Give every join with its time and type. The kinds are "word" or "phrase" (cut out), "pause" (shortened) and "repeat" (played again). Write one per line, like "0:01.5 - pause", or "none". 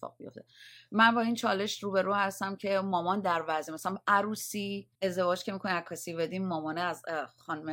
0:04.9 - pause